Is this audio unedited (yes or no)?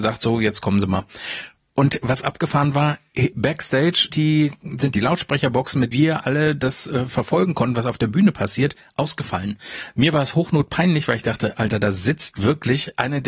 no